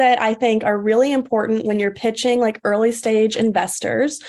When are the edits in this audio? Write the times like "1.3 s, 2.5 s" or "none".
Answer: none